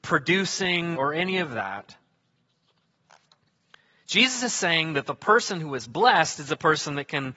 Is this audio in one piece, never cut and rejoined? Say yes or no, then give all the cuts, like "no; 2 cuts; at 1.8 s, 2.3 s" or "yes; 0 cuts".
no; 1 cut; at 0.9 s